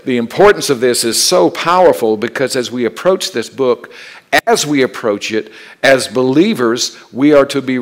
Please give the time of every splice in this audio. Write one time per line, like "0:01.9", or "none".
none